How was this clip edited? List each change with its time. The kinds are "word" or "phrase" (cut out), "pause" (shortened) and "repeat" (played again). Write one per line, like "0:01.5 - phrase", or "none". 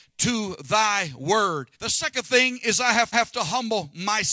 0:01.7 - pause
0:03.1 - repeat